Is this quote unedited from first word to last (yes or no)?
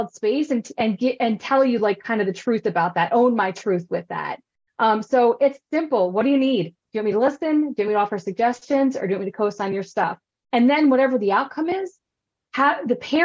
yes